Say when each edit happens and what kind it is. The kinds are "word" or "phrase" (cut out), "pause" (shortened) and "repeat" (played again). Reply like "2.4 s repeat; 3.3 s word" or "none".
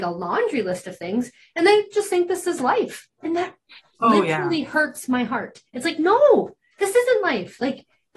none